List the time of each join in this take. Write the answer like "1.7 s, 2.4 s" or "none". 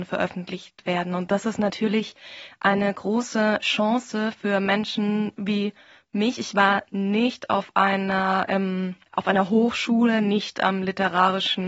9.0 s